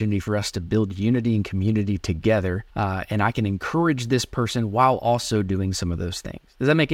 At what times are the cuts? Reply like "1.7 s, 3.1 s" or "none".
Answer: 2.7 s